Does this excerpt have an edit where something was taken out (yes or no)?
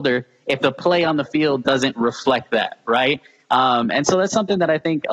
no